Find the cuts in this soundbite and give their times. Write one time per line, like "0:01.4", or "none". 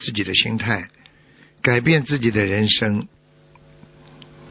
none